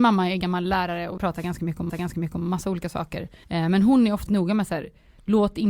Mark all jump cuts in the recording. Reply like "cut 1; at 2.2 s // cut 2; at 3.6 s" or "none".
cut 1; at 1.2 s // cut 2; at 1.9 s // cut 3; at 3.4 s // cut 4; at 4.3 s